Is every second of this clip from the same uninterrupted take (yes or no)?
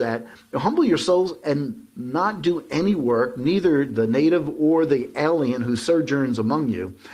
yes